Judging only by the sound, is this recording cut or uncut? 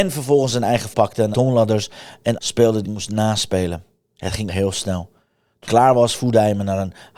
cut